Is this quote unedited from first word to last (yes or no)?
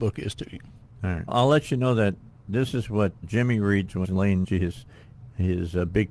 no